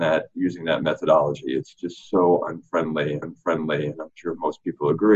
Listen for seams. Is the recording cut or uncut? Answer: cut